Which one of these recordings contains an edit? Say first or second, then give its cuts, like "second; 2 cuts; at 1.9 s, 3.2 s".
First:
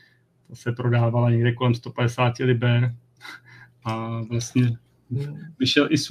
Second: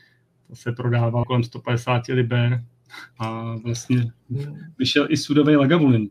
second; 3 cuts; at 1.2 s, 3.1 s, 4.2 s